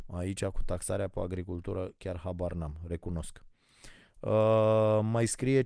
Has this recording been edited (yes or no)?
no